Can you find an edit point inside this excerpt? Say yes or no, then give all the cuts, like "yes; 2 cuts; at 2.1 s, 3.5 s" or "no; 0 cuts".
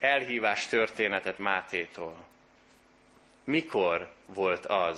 no; 0 cuts